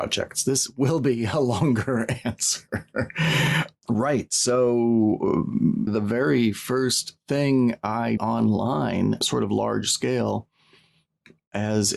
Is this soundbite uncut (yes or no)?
no